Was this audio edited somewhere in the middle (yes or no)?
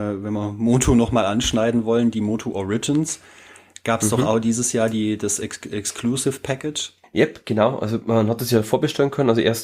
no